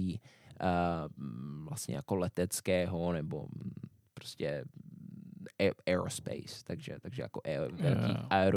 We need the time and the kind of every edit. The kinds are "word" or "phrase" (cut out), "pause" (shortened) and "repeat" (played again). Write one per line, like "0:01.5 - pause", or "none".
none

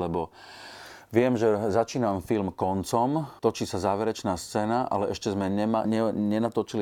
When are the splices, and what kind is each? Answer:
0:03.4 - pause
0:05.8 - word

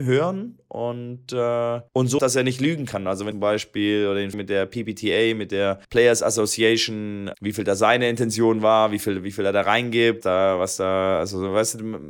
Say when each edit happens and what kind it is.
0:01.9 - pause
0:02.2 - word
0:03.3 - phrase
0:04.3 - word
0:05.8 - pause
0:07.3 - word
0:10.2 - word

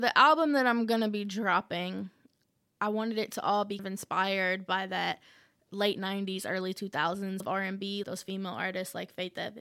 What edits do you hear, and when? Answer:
0:03.8 - word
0:07.4 - word
0:08.0 - word

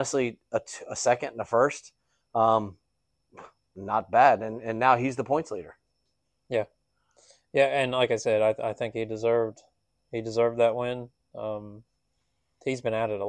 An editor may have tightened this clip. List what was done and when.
none

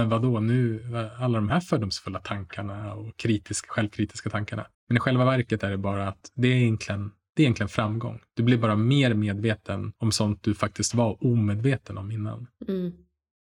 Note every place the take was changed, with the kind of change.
0:04.7 - pause
0:10.0 - pause

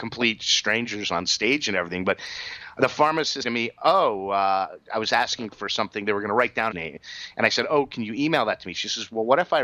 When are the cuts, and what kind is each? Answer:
0:03.4 - word
0:06.7 - phrase

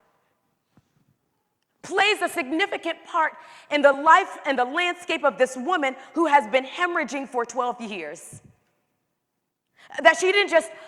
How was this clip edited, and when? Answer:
none

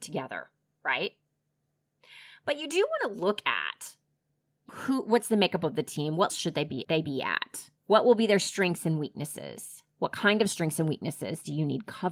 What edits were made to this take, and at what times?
0:04.7 - word
0:06.3 - word
0:06.8 - phrase
0:07.8 - pause

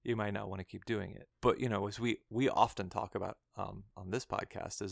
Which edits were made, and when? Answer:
0:01.3 - pause

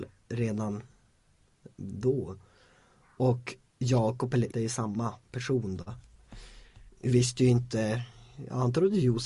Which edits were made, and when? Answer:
0:03.7 - word
0:04.5 - word

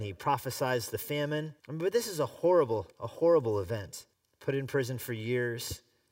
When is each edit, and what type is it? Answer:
0:01.6 - pause
0:02.9 - pause
0:04.1 - pause

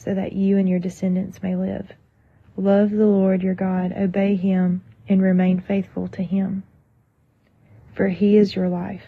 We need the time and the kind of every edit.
none

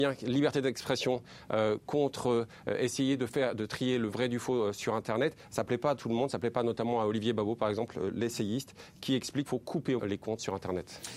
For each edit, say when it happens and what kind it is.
0:09.5 - word
0:10.0 - word

